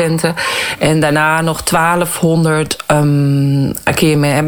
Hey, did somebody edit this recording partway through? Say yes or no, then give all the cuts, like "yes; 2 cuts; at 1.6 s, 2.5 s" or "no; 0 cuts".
no; 0 cuts